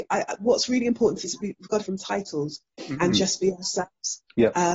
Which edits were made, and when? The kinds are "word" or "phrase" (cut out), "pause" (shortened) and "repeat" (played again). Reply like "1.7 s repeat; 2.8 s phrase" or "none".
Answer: 1.2 s word; 1.8 s phrase